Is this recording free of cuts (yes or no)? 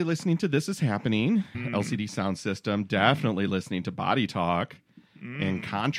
no